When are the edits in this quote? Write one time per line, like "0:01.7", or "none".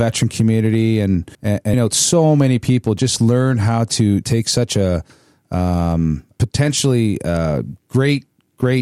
0:01.3
0:01.7
0:04.2